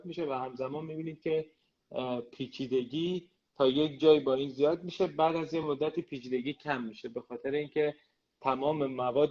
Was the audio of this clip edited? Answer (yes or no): no